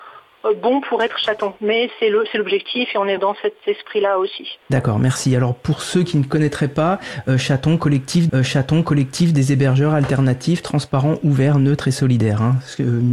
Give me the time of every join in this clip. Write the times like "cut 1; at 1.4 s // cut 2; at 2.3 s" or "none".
cut 1; at 3.2 s // cut 2; at 4.6 s // cut 3; at 8.3 s